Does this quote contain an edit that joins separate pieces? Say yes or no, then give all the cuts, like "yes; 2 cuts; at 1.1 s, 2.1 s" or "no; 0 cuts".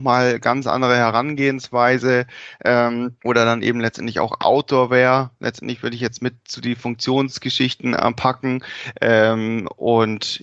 yes; 1 cut; at 3.2 s